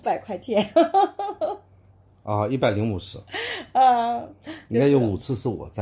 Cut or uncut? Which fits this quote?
uncut